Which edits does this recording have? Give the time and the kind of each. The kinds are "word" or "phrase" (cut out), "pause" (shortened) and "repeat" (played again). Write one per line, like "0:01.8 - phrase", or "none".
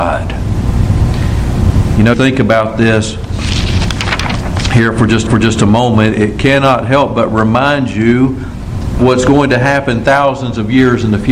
0:02.1 - word
0:05.3 - repeat
0:09.0 - word